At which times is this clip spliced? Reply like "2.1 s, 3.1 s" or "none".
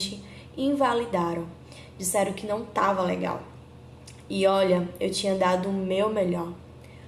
none